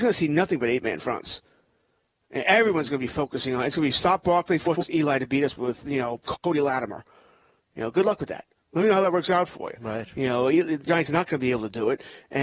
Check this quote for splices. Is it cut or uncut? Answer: uncut